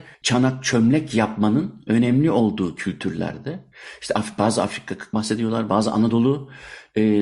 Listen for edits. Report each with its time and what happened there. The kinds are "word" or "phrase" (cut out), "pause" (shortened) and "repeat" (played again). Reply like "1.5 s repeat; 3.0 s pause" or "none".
5.1 s word